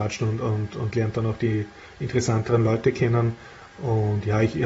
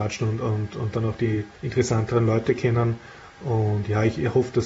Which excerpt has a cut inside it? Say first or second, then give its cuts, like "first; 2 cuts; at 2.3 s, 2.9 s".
second; 2 cuts; at 0.9 s, 1.5 s